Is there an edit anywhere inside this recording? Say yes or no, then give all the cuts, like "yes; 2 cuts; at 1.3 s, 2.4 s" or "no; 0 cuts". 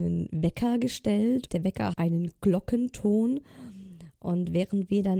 yes; 2 cuts; at 1.5 s, 1.9 s